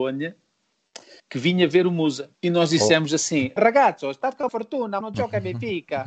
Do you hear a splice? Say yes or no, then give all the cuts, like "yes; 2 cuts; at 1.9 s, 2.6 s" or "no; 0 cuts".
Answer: yes; 5 cuts; at 1.2 s, 2.3 s, 3.6 s, 4.5 s, 5.0 s